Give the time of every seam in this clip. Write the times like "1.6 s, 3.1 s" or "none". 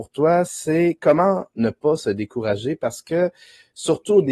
none